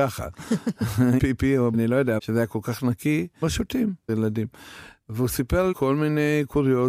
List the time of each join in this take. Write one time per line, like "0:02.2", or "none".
0:01.2
0:01.7
0:02.2
0:03.4
0:04.1
0:05.7